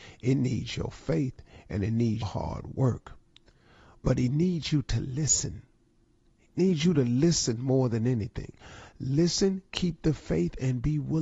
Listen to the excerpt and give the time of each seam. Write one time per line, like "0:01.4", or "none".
0:02.2